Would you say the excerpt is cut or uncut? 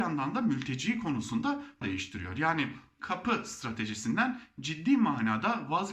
cut